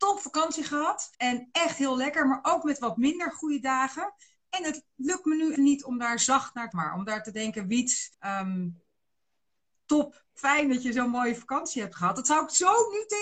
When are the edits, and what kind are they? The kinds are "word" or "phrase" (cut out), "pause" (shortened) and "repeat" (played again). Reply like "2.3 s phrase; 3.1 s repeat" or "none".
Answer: 1.1 s pause; 5.6 s word; 6.7 s phrase; 8.1 s pause